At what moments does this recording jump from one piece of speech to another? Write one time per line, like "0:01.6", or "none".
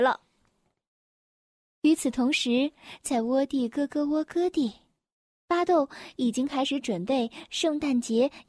none